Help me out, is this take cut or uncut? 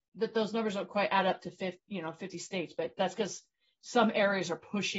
uncut